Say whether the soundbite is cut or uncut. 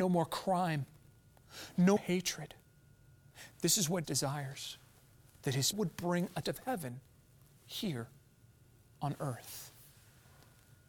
cut